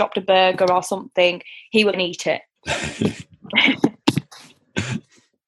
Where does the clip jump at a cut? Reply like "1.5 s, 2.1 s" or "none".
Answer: 1.9 s